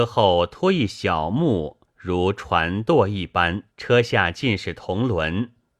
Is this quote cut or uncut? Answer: cut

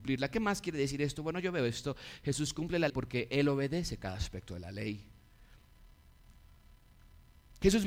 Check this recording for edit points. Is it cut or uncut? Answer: cut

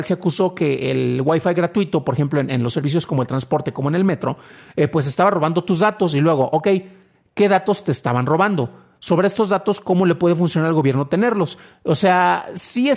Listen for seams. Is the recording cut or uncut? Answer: uncut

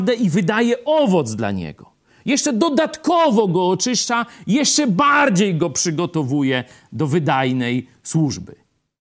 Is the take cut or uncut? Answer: uncut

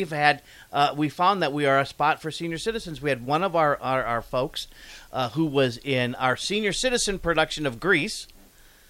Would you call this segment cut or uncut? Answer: uncut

